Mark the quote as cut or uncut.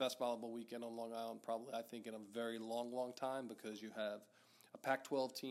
uncut